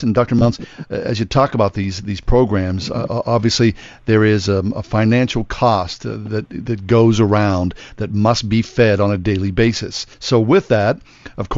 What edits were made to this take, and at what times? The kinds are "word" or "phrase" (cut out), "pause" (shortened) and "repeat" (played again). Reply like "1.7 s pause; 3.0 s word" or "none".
10.1 s pause